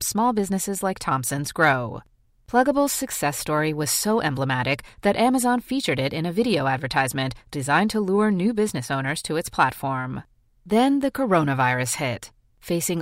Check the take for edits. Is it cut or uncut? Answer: uncut